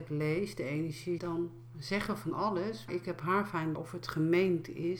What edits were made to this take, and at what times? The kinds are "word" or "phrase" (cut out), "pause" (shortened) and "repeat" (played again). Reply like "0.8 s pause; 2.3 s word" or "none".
1.2 s word; 2.9 s word; 3.7 s word